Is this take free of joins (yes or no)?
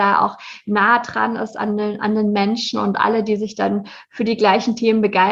yes